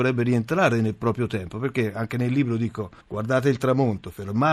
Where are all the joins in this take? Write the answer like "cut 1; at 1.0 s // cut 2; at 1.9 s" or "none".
cut 1; at 3.0 s